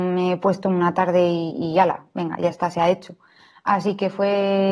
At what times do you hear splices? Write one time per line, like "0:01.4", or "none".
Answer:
none